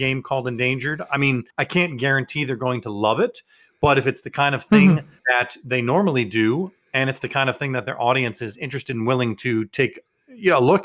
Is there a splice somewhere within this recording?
yes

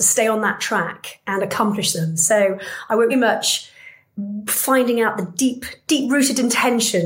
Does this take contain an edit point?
yes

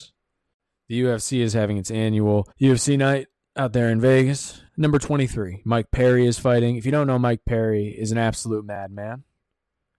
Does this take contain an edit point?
yes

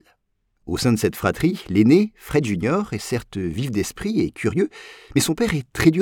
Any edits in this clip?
no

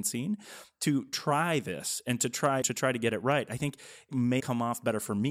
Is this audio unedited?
no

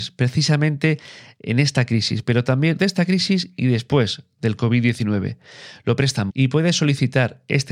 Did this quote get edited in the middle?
yes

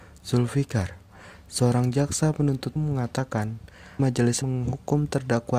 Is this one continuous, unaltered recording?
no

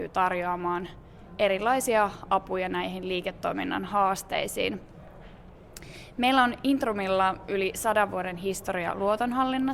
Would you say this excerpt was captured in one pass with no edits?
yes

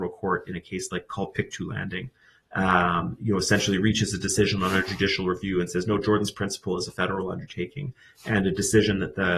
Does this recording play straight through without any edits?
yes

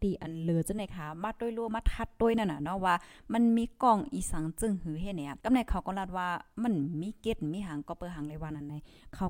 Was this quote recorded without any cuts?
no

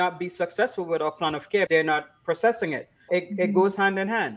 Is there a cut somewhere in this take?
yes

